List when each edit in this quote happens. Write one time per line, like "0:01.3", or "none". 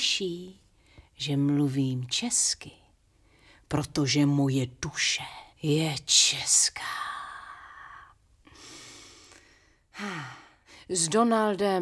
0:05.5

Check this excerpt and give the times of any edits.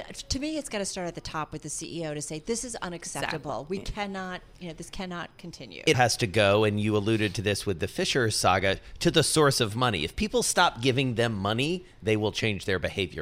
0:05.9

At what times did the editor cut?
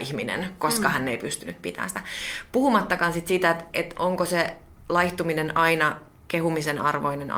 none

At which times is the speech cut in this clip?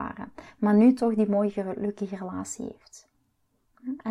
none

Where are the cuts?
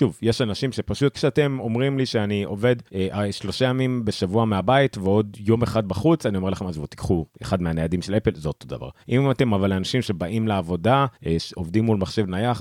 0:01.1
0:02.9
0:07.3
0:09.0
0:11.1

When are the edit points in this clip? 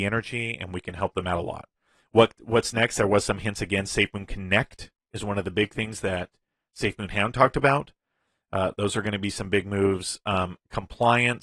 none

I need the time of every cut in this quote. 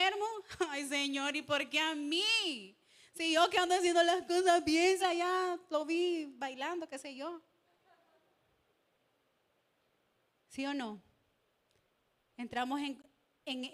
0:05.0

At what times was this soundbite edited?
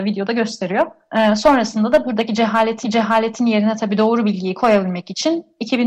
0:02.8

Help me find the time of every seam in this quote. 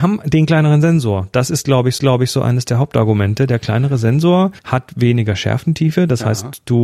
0:02.0
0:04.6

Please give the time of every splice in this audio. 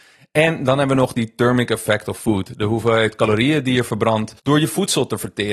0:04.4

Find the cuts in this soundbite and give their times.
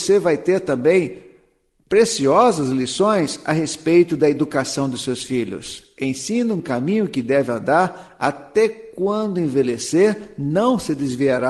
0:06.6

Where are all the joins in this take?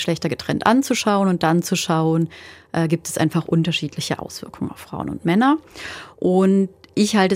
none

